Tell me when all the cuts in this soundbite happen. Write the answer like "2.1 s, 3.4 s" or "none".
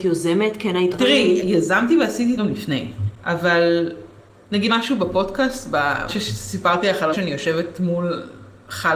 0.9 s, 2.4 s, 4.7 s, 6.1 s, 7.1 s